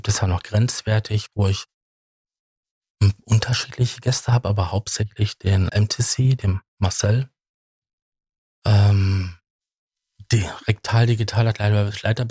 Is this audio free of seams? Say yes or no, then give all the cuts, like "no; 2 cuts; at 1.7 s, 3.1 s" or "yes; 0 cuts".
no; 1 cut; at 5.7 s